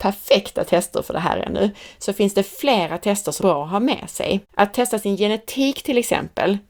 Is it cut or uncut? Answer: cut